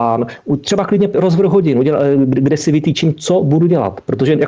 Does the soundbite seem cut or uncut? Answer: cut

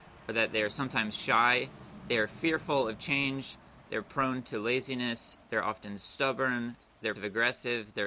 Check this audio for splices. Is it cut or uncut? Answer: cut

